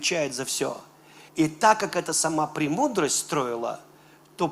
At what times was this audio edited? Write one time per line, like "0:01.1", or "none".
0:01.3